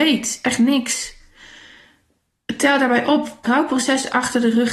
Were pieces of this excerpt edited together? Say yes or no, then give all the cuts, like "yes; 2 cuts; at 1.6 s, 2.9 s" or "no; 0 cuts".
yes; 1 cut; at 3.5 s